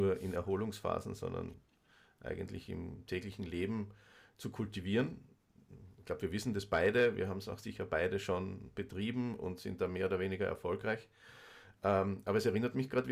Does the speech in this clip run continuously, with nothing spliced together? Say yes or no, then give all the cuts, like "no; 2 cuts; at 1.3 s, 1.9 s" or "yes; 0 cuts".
yes; 0 cuts